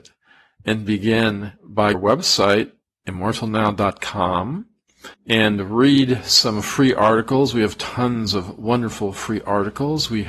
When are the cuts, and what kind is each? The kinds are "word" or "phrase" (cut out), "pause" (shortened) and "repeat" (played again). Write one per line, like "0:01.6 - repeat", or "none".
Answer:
0:01.9 - phrase
0:05.1 - pause

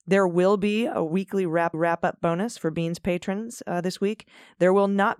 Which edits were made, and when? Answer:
0:01.7 - repeat

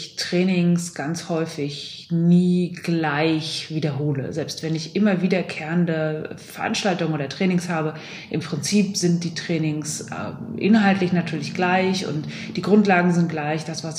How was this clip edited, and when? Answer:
none

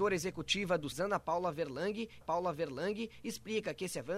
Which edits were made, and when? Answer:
0:00.9 - word
0:02.2 - repeat

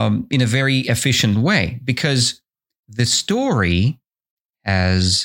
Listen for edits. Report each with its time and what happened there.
none

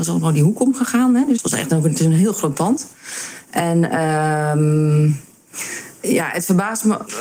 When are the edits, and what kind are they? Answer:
0:01.4 - word

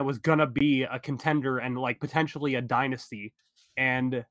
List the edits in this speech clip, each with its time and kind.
none

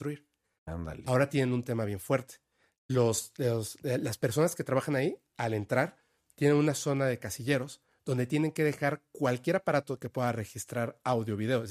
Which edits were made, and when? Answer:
none

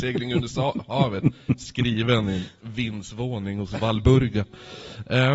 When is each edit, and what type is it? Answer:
none

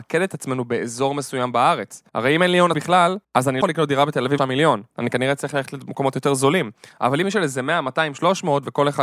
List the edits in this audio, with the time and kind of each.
0:02.1 - pause
0:02.7 - word
0:03.2 - pause
0:03.6 - word
0:04.4 - word
0:04.9 - pause
0:07.2 - phrase

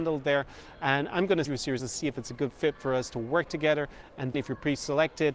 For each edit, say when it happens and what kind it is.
0:01.5 - word
0:01.8 - phrase
0:04.3 - word

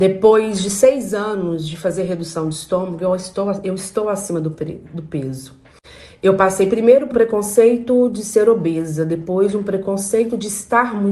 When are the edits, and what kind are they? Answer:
0:07.1 - word

